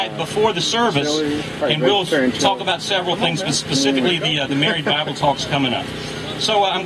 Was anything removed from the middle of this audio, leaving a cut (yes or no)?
yes